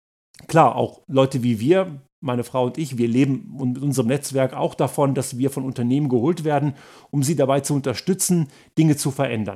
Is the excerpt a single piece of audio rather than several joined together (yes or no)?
yes